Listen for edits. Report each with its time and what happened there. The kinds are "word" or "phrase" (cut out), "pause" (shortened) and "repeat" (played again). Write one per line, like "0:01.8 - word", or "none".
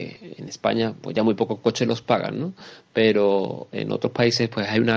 none